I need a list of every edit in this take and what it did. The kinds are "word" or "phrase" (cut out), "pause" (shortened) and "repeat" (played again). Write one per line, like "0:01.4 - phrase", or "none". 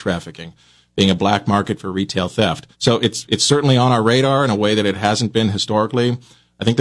0:02.7 - pause

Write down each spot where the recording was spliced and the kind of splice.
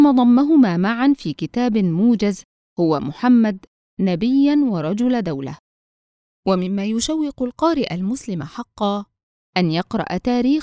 none

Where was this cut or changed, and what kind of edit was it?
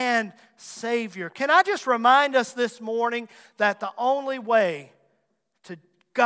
none

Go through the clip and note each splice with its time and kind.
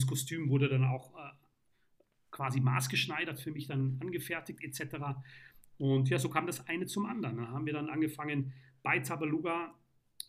none

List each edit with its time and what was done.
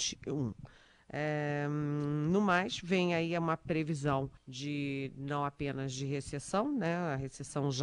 0:04.4 - pause

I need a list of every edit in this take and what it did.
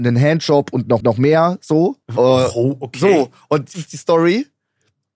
0:01.0 - repeat
0:02.0 - pause
0:03.7 - word

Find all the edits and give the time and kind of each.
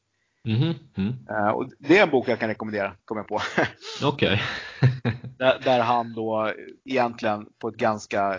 0:03.0 - pause
0:06.8 - pause

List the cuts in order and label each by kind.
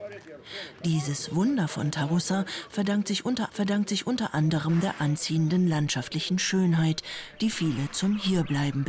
0:03.5 - repeat

